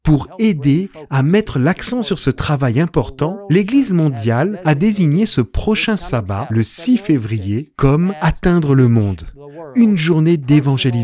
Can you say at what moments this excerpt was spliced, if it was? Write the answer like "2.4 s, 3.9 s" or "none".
none